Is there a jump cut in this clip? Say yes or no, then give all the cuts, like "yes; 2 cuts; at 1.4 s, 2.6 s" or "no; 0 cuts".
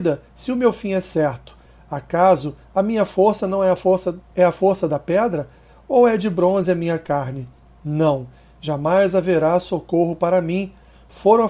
no; 0 cuts